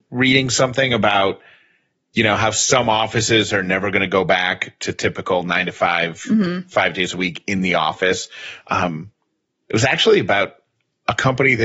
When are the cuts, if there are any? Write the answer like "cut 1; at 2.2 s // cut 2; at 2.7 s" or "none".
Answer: none